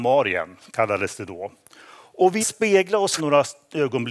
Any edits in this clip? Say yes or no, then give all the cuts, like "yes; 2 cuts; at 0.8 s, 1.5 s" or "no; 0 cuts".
yes; 2 cuts; at 2.4 s, 3.2 s